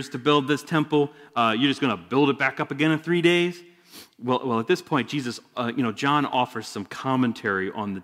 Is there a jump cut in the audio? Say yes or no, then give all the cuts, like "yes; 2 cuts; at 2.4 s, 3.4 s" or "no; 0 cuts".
no; 0 cuts